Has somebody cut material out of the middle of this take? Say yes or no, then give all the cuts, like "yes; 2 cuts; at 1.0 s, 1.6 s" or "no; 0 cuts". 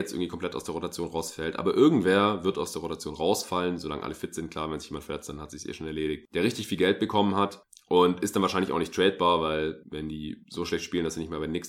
no; 0 cuts